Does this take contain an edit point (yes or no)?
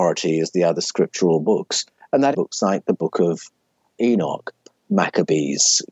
yes